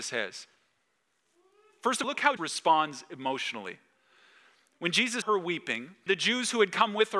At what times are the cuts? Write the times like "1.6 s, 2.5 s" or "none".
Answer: 2.0 s, 2.4 s, 5.2 s, 6.1 s